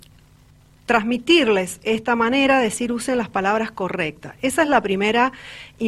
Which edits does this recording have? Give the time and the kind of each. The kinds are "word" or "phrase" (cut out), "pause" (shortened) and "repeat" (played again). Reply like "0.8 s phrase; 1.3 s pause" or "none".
none